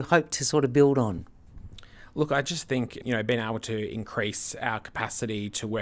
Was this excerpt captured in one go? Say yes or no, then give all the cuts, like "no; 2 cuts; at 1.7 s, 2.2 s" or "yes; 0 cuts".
yes; 0 cuts